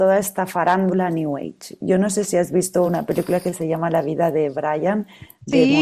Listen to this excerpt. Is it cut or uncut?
uncut